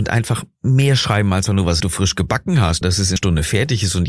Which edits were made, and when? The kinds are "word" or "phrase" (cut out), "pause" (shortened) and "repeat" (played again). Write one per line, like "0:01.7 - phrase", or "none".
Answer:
0:01.5 - word
0:01.8 - phrase
0:02.8 - word
0:03.2 - word